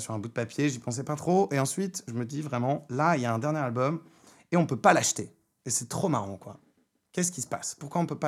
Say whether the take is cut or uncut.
uncut